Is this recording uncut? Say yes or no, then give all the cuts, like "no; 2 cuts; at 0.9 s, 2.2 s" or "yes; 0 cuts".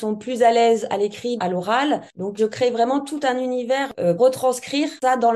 no; 3 cuts; at 1.4 s, 2.4 s, 4.2 s